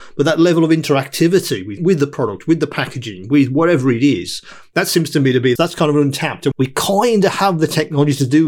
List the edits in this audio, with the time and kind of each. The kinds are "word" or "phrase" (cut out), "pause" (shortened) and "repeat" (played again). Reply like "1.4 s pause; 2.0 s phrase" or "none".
1.8 s word; 5.6 s word; 6.5 s word